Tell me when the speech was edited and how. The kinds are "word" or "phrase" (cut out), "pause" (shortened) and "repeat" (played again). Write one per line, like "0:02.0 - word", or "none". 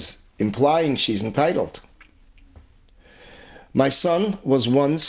none